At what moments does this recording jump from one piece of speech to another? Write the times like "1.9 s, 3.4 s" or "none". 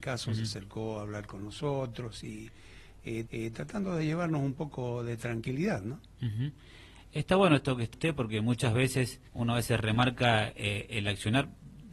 3.3 s, 7.9 s, 9.3 s